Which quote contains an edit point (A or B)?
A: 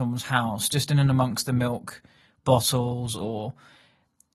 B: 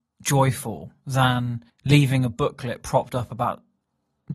B